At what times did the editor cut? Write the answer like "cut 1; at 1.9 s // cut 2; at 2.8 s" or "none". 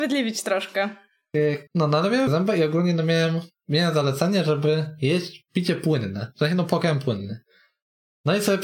cut 1; at 1.7 s // cut 2; at 2.3 s